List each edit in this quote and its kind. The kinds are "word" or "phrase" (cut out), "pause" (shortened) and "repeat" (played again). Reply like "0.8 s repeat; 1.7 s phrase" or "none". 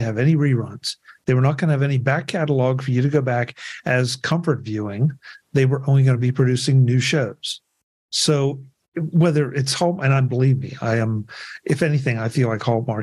none